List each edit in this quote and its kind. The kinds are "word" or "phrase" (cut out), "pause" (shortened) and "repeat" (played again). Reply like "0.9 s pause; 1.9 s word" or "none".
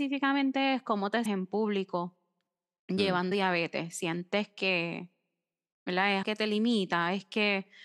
1.3 s word; 3.3 s word; 6.2 s word